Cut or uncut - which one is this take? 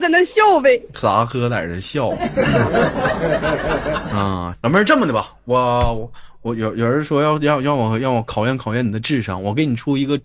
cut